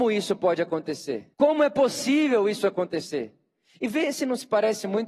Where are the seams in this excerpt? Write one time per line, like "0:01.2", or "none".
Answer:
0:01.3